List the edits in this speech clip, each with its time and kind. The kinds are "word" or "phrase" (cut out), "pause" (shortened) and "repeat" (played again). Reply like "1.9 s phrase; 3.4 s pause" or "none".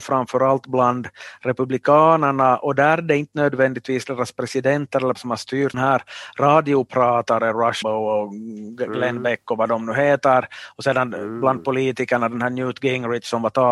5.2 s word; 5.7 s phrase; 7.8 s word